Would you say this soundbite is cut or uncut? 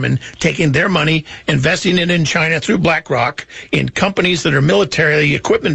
uncut